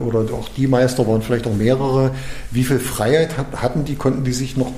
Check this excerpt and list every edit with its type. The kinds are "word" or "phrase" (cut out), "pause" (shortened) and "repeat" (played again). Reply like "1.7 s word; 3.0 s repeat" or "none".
none